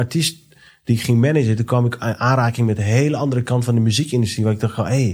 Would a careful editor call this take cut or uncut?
uncut